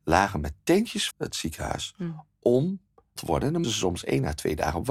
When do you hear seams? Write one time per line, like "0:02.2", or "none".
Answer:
0:01.1
0:03.2
0:03.6